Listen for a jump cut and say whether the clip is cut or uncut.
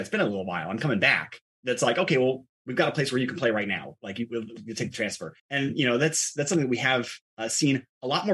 cut